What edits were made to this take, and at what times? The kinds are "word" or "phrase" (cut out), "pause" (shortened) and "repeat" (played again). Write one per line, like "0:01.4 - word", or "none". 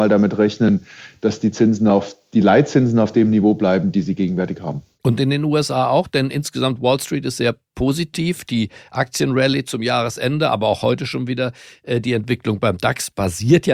none

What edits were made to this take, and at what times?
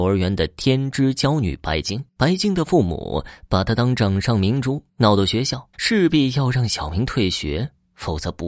0:02.1 - pause
0:04.9 - pause
0:05.7 - pause

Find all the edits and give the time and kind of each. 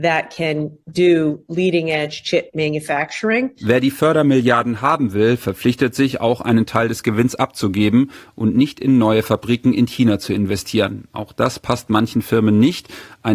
none

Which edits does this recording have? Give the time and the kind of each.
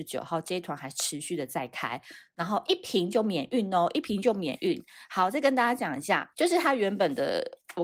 0:06.3 - pause

